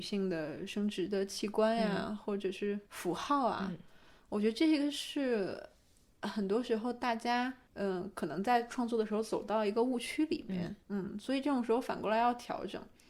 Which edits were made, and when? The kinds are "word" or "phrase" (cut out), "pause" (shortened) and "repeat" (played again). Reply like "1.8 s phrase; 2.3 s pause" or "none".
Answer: 2.9 s pause; 7.7 s pause; 10.8 s pause